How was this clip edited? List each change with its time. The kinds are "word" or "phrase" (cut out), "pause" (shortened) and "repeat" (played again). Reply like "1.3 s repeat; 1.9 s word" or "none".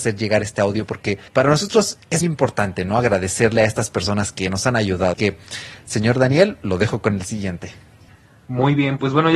1.3 s pause; 2.2 s word; 5.1 s word; 8.1 s pause